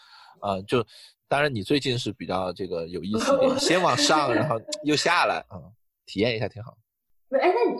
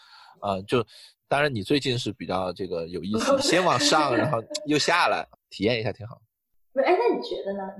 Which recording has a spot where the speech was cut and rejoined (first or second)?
second